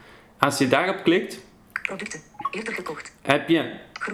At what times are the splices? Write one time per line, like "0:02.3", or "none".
0:03.2